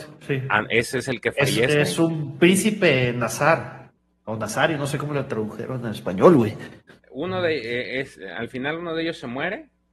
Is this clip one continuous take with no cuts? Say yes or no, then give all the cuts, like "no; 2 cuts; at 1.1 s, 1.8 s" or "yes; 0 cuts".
no; 2 cuts; at 4.0 s, 7.0 s